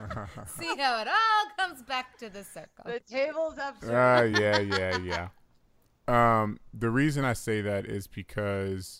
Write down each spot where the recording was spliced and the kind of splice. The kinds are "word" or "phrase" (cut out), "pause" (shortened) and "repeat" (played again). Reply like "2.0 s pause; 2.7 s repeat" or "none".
none